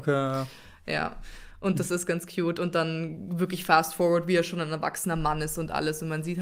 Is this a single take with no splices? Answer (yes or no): yes